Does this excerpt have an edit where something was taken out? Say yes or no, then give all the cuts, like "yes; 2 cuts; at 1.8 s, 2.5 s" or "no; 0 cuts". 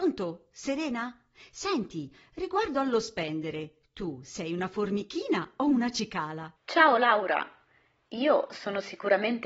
yes; 1 cut; at 6.6 s